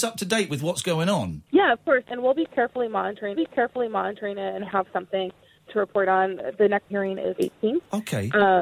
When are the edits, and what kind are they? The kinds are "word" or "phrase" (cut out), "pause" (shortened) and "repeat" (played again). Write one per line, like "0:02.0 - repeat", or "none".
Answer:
0:01.5 - pause
0:03.3 - repeat
0:04.7 - word
0:05.7 - word
0:06.9 - word
0:07.4 - word